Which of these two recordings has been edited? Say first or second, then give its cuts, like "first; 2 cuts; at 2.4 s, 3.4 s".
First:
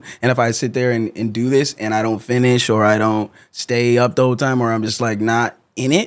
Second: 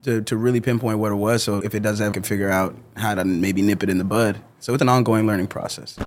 second; 3 cuts; at 1.6 s, 2.1 s, 4.8 s